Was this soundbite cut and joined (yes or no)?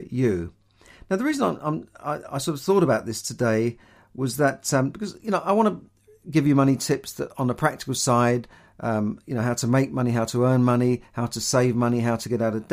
no